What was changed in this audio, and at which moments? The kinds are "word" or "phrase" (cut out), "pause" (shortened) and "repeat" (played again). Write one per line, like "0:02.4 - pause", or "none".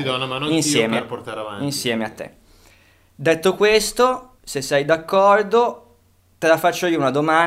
0:04.3 - pause